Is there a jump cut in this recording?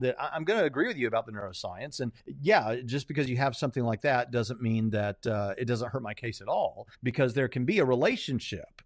yes; 2 cuts; at 2.2 s, 6.9 s

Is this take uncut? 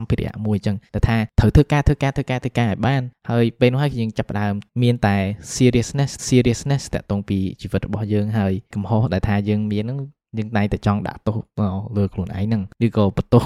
no; 1 cut; at 6.2 s

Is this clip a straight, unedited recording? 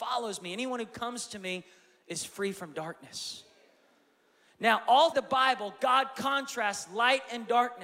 no; 1 cut; at 5.1 s

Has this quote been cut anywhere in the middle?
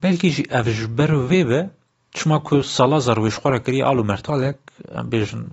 no; 0 cuts

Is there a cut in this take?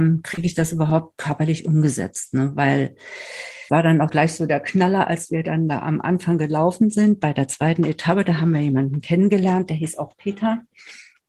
yes; 2 cuts; at 3.7 s, 4.1 s

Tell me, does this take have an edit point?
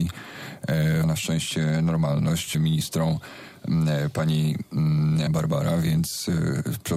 yes; 3 cuts; at 1.0 s, 2.5 s, 5.3 s

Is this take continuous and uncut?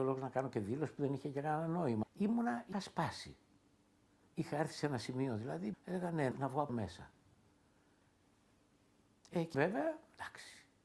no; 6 cuts; at 2.0 s, 2.7 s, 5.7 s, 6.3 s, 6.7 s, 9.5 s

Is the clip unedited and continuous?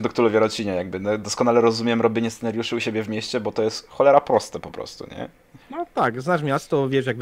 no; 1 cut; at 5.6 s

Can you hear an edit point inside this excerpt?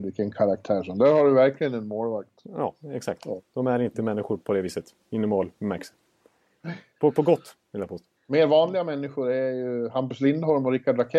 yes; 2 cuts; at 2.8 s, 8.2 s

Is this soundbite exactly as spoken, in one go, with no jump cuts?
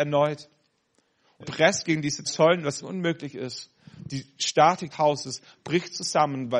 no; 4 cuts; at 1.4 s, 2.3 s, 2.8 s, 4.9 s

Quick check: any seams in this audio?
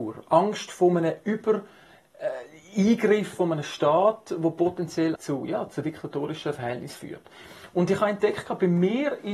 yes; 1 cut; at 5.2 s

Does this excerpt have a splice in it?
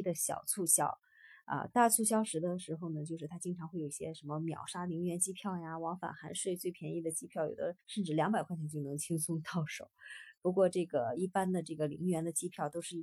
yes; 1 cut; at 7.8 s

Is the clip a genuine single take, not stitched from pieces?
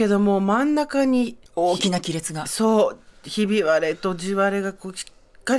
no; 1 cut; at 1.5 s

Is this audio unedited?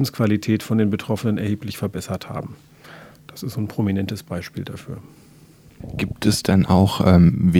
yes; 0 cuts

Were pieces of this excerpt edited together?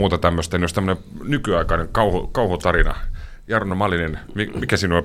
no; 0 cuts

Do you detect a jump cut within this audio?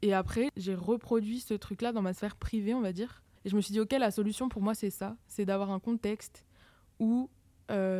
yes; 1 cut; at 3.4 s

